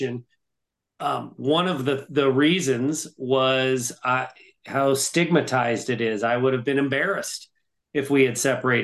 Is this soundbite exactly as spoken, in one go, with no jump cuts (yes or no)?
yes